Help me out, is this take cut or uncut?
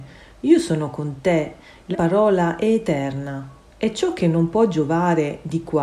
cut